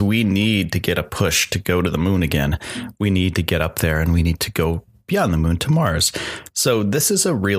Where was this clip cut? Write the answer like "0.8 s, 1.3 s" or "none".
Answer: none